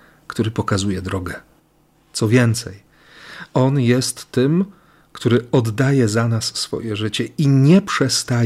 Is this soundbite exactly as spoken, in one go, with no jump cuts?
yes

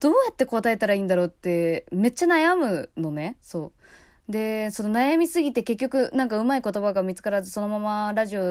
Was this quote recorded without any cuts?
yes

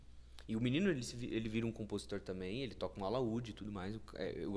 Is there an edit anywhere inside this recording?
no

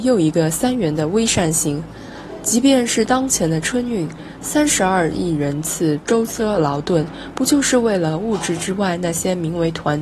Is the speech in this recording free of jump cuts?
yes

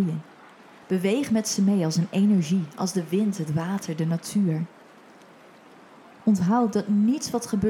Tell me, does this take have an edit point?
no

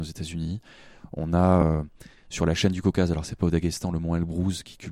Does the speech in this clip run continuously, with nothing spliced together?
yes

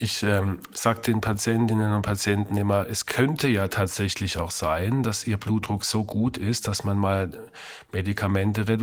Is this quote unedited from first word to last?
yes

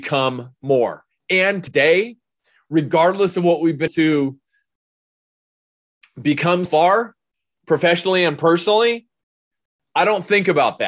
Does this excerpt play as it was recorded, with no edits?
no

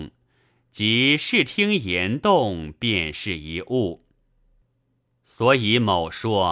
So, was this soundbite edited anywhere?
no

